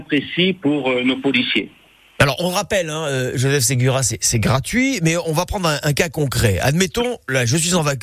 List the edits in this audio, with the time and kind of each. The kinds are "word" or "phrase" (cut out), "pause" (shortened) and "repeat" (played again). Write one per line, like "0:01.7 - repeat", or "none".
none